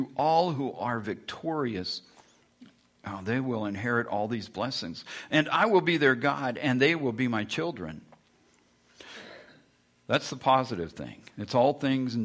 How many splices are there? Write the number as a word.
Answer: zero